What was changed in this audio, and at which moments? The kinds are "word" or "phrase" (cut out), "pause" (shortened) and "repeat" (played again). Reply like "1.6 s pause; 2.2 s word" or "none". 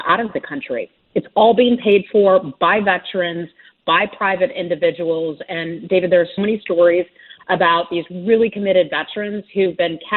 6.4 s word